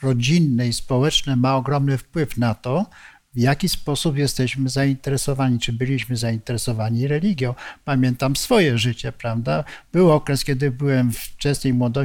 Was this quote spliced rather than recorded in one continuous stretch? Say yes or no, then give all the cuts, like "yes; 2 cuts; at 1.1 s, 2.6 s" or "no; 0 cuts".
no; 0 cuts